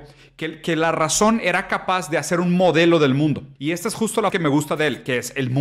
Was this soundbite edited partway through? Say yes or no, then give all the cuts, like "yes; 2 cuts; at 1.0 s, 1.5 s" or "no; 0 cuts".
yes; 2 cuts; at 3.6 s, 4.3 s